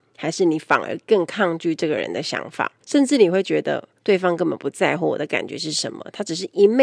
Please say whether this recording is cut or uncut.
cut